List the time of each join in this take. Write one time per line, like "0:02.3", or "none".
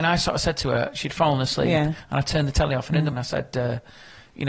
0:03.1